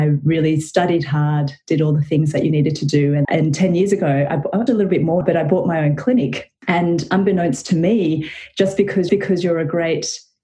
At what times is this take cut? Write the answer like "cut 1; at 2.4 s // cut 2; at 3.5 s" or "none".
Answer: cut 1; at 3.2 s // cut 2; at 4.7 s // cut 3; at 5.2 s // cut 4; at 6.6 s // cut 5; at 9.1 s